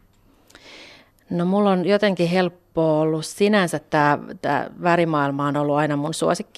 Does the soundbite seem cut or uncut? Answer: uncut